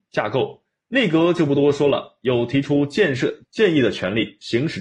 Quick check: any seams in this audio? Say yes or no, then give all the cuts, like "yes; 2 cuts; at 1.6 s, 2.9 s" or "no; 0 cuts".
yes; 1 cut; at 3.4 s